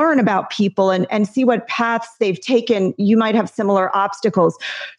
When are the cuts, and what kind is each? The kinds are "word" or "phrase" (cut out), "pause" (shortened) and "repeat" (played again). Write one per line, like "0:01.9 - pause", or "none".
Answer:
none